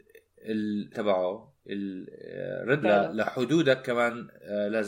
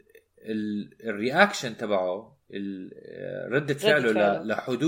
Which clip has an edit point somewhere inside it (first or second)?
first